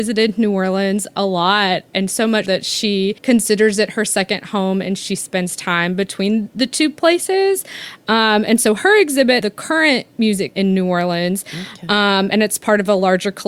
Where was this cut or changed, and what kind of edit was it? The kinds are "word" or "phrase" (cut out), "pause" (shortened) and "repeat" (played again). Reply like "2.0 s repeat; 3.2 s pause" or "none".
2.5 s word; 3.2 s pause; 9.4 s phrase; 10.5 s word